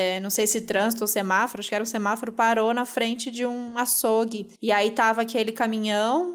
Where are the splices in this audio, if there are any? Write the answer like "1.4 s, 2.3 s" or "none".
4.5 s